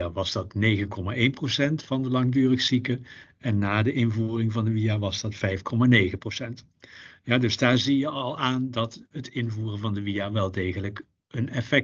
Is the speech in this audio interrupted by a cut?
yes; 1 cut; at 9.1 s

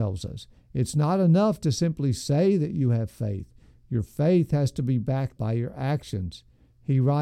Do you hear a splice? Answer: yes; 1 cut; at 5.4 s

